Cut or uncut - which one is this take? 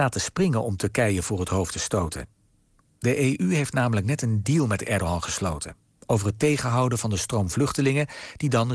uncut